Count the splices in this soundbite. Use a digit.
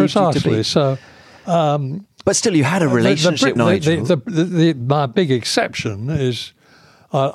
1